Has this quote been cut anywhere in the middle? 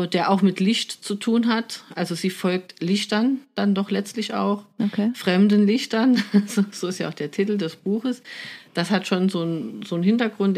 no; 0 cuts

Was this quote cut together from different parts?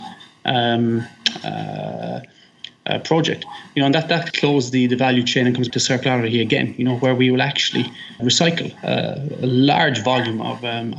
yes; 3 cuts; at 4.3 s, 5.7 s, 8.2 s

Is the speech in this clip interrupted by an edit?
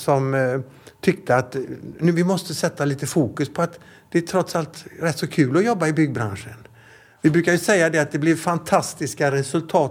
no; 0 cuts

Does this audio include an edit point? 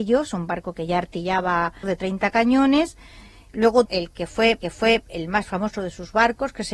yes; 3 cuts; at 1.8 s, 3.9 s, 4.6 s

